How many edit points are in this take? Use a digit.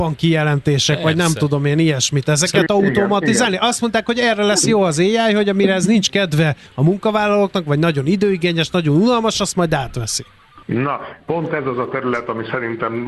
2